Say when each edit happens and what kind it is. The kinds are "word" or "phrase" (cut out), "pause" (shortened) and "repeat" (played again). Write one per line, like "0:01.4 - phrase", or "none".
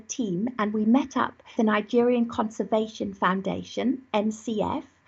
0:01.6 - word